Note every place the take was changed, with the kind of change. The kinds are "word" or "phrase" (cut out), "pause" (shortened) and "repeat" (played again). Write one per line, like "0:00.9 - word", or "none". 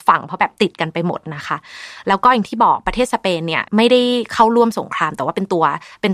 0:03.7 - pause